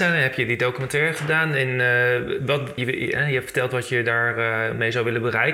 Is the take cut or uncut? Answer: cut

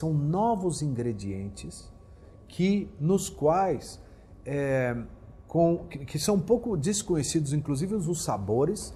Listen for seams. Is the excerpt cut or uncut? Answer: uncut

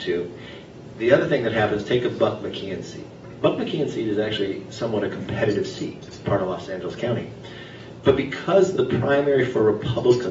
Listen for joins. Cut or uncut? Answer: uncut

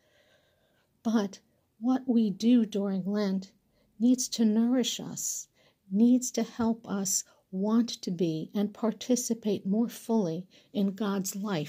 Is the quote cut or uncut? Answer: uncut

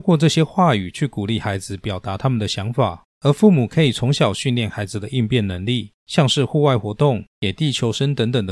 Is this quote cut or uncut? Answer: cut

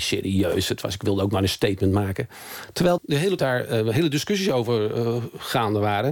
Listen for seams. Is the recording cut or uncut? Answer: cut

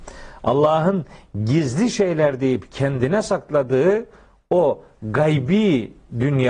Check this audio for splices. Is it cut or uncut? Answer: uncut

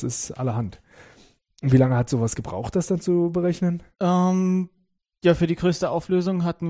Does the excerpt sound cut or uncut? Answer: uncut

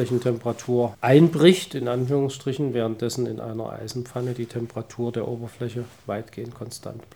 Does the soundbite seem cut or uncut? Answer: uncut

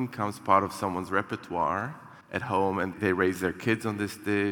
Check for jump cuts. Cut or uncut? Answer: cut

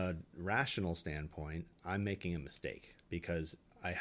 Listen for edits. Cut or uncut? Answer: cut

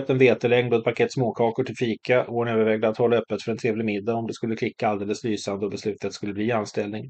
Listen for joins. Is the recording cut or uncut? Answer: uncut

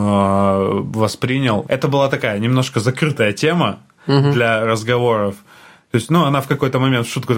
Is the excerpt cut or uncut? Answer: uncut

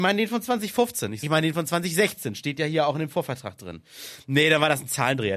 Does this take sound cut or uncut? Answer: cut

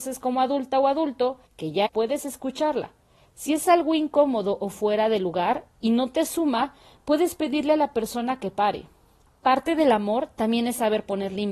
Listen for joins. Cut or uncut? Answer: cut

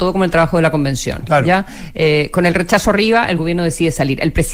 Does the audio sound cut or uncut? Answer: uncut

